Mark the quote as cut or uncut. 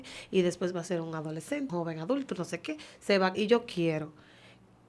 cut